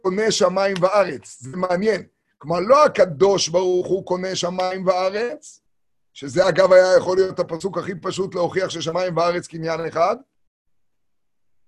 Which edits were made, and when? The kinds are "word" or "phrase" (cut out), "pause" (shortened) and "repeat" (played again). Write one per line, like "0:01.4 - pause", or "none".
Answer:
none